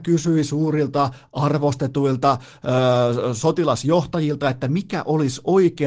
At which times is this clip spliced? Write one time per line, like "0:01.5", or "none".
none

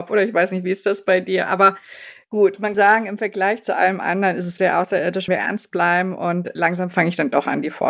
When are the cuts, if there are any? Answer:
0:02.7
0:04.6
0:05.3

